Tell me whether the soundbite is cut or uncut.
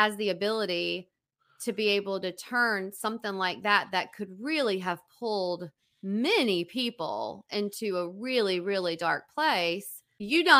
uncut